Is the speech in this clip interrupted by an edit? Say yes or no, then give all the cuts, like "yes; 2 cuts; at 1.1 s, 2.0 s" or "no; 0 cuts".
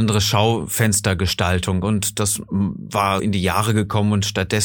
yes; 1 cut; at 3.2 s